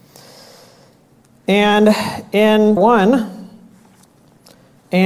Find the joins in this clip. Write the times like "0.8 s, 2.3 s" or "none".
2.8 s